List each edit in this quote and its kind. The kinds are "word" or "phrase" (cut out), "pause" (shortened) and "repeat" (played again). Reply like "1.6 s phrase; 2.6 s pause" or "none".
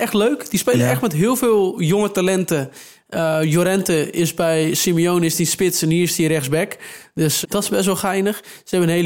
7.4 s word